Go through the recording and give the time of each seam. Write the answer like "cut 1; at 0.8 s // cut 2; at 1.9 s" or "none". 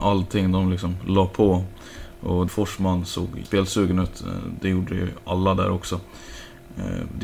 cut 1; at 2.5 s // cut 2; at 3.4 s